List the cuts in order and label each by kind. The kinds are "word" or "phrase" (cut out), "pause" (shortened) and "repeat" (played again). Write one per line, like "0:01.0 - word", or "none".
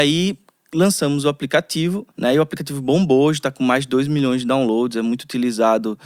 0:02.1 - pause